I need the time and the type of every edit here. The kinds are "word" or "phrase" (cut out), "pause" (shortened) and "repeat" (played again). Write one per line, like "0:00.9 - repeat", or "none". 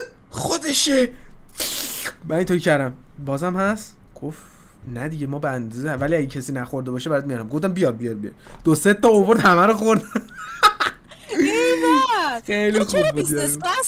none